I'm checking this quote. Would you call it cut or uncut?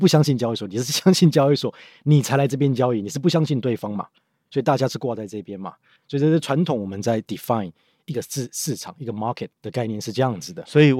cut